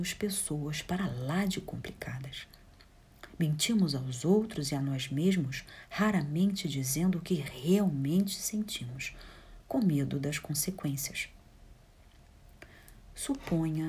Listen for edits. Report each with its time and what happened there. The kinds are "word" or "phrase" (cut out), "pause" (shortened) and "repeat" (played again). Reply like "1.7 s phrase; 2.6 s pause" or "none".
none